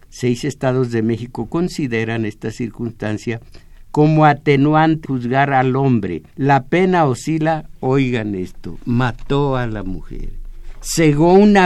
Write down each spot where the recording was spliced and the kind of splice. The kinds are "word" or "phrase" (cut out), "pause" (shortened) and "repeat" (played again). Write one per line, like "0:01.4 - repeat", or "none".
0:05.0 - word
0:06.3 - pause